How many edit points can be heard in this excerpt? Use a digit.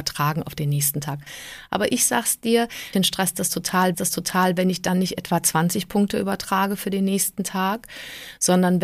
2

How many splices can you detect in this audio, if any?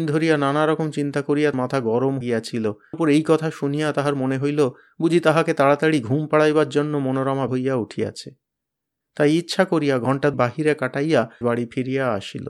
6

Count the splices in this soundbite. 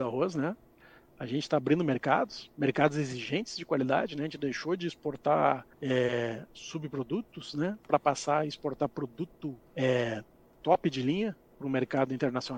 2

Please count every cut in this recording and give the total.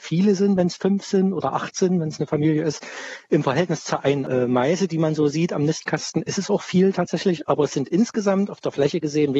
1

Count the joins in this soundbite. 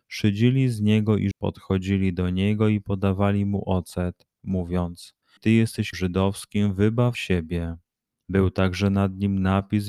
4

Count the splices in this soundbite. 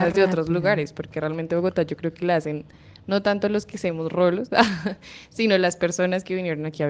0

